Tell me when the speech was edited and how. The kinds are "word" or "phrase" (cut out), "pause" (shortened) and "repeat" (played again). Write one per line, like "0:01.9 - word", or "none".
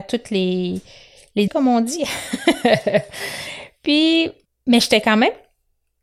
0:01.5 - word
0:04.5 - pause